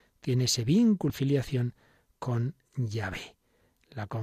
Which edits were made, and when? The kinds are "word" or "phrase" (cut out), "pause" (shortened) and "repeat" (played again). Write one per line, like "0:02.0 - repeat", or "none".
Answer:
0:01.1 - word